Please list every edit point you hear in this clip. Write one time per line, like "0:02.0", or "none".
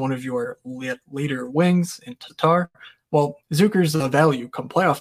0:02.3
0:03.4